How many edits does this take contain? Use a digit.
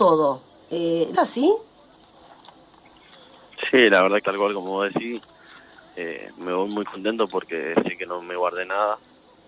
2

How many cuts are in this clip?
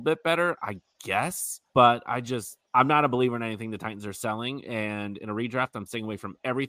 2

